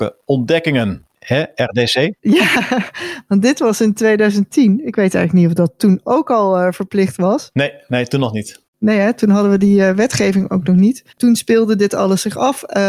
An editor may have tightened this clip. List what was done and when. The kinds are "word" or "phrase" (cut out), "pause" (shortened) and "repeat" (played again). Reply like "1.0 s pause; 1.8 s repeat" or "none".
1.1 s pause; 2.2 s pause; 8.7 s pause; 11.1 s pause